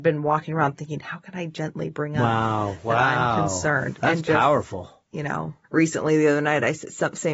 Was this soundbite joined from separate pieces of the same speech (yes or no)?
yes